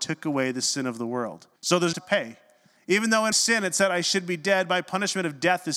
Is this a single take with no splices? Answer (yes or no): no